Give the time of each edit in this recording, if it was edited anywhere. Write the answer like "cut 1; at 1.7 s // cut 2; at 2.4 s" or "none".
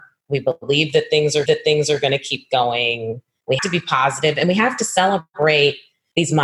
cut 1; at 1.5 s // cut 2; at 3.6 s